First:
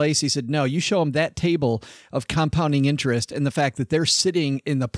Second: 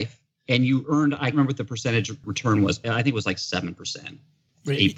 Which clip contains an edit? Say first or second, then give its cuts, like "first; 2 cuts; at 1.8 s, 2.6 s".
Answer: second; 2 cuts; at 1.3 s, 2.8 s